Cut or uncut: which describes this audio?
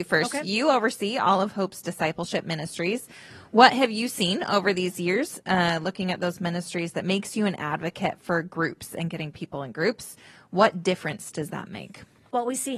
uncut